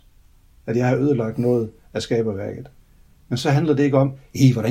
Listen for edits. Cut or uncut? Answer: uncut